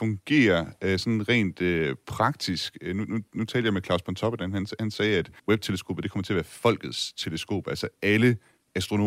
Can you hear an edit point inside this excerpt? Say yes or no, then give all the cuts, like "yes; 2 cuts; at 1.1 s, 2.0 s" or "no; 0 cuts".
yes; 1 cut; at 5.4 s